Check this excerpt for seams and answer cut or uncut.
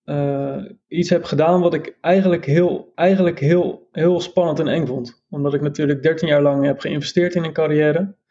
cut